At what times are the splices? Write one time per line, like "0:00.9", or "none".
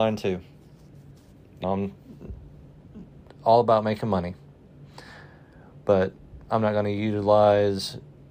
0:01.6

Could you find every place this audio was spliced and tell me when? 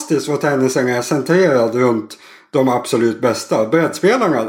none

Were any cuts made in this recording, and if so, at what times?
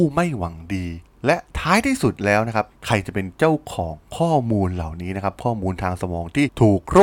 0:02.7

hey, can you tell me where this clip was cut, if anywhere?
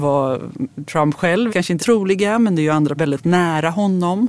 0:01.5
0:01.8
0:03.0

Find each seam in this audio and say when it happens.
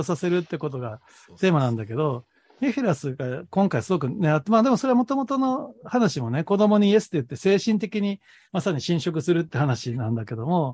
none

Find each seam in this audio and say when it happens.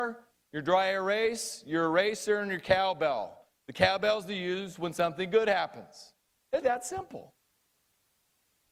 0:06.6

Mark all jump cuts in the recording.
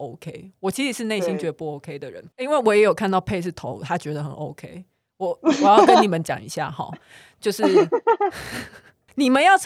0:02.3

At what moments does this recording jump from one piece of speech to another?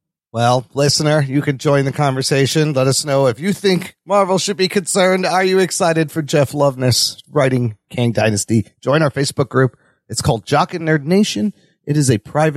none

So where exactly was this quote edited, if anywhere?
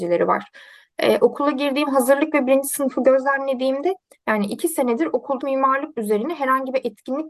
0:05.4

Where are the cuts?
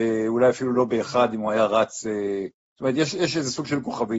none

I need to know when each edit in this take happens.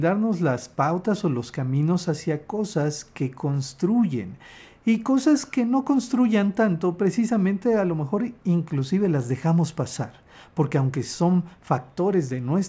none

